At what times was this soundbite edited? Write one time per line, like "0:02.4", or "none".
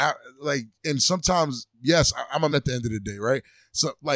0:01.7
0:02.5